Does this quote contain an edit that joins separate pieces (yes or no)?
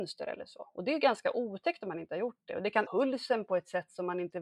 yes